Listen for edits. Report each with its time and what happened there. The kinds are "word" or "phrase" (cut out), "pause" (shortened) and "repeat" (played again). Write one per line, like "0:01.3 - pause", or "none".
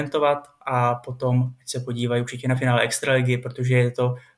none